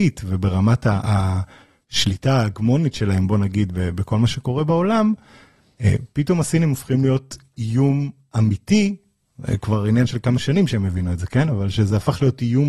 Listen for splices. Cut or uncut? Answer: uncut